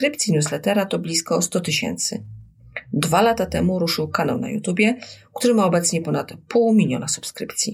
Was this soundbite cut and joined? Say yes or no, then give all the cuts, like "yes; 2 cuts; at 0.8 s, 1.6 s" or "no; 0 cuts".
no; 0 cuts